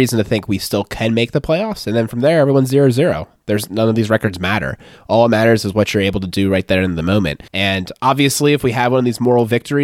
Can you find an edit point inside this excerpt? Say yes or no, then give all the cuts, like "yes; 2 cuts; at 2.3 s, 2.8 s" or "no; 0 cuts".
yes; 1 cut; at 7.5 s